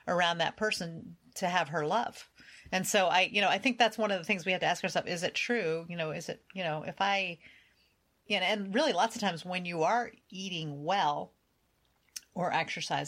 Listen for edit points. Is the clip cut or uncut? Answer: uncut